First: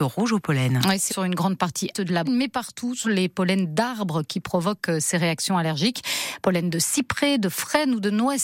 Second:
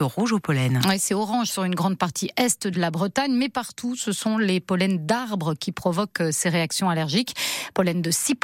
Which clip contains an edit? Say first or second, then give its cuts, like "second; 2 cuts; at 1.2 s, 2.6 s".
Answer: first; 4 cuts; at 1.1 s, 1.9 s, 2.3 s, 3.0 s